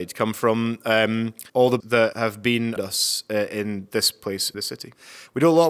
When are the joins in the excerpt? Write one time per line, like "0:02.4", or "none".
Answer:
0:01.5
0:01.8
0:02.1
0:02.8
0:04.5